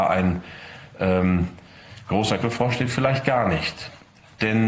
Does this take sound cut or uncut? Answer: cut